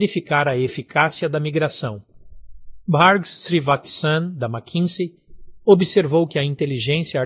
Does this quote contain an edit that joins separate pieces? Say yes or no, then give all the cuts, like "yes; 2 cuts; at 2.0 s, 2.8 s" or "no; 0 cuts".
no; 0 cuts